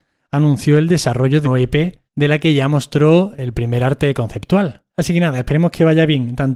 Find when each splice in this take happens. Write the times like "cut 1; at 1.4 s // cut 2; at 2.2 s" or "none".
cut 1; at 1.4 s // cut 2; at 2.1 s // cut 3; at 4.9 s